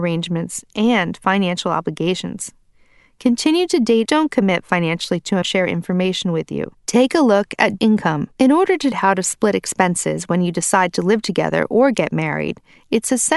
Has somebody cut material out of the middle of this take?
yes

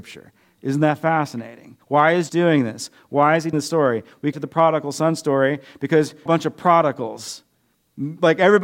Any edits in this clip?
yes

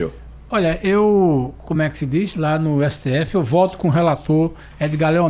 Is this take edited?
no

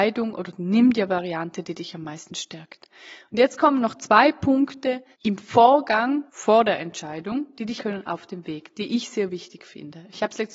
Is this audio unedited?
no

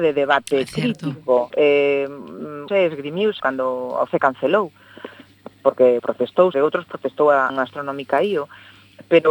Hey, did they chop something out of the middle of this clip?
yes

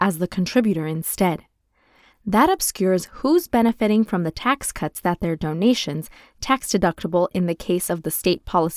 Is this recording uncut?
yes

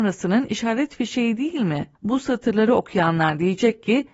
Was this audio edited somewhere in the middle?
yes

